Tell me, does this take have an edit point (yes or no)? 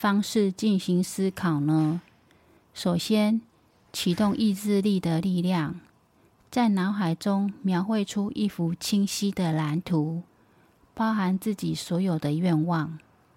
no